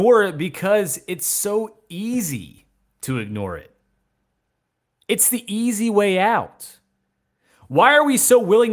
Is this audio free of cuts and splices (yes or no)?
yes